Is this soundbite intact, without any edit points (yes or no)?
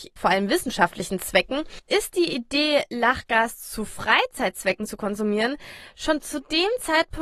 yes